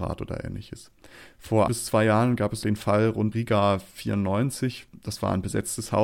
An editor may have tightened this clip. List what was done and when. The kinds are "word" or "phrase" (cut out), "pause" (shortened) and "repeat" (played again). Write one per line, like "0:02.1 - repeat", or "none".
0:01.7 - word
0:02.6 - word
0:03.3 - word